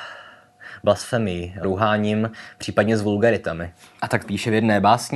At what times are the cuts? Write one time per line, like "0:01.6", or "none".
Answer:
0:01.6
0:04.2